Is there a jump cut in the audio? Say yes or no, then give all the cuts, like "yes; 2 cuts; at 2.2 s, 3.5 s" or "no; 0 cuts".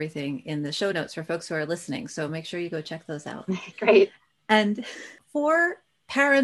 no; 0 cuts